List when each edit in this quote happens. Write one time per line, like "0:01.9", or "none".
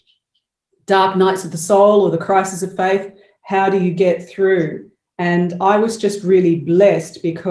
none